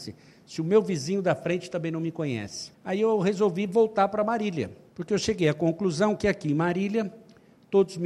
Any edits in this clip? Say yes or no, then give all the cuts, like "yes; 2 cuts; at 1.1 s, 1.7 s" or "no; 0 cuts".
yes; 2 cuts; at 2.7 s, 4.9 s